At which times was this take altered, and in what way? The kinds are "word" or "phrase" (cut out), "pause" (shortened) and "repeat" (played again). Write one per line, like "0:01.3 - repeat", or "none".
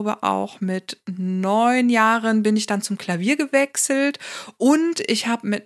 none